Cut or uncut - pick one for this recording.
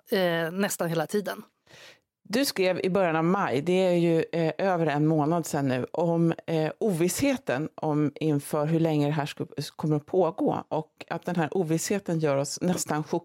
uncut